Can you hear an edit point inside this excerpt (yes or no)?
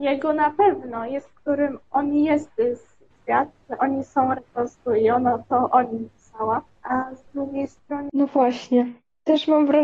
yes